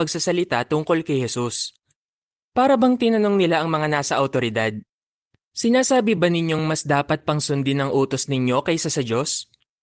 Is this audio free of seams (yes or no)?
yes